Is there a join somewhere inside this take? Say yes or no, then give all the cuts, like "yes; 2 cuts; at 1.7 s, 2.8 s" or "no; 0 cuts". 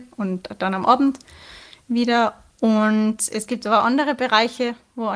no; 0 cuts